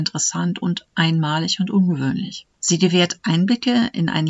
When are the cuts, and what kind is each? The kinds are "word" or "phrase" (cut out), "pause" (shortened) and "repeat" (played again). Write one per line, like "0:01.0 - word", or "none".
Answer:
0:02.5 - pause